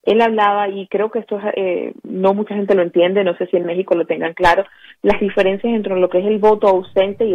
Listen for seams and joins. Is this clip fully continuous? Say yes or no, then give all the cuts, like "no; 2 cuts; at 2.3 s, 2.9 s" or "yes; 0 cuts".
yes; 0 cuts